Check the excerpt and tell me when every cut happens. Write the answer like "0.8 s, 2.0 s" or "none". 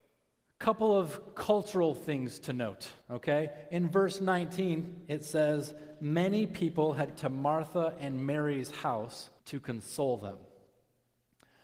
3.0 s, 7.2 s, 9.4 s